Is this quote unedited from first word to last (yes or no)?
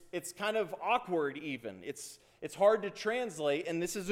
yes